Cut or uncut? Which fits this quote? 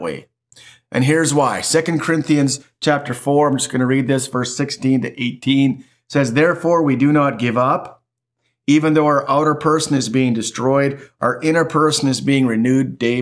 uncut